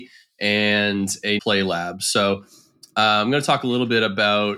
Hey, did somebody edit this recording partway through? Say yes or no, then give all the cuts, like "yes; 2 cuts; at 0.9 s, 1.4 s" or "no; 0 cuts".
yes; 1 cut; at 1.4 s